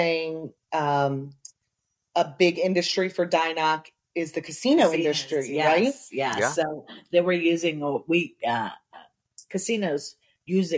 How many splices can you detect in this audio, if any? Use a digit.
0